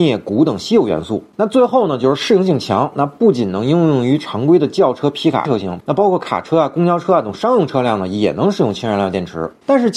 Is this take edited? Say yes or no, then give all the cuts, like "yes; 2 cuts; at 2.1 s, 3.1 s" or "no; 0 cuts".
yes; 1 cut; at 5.4 s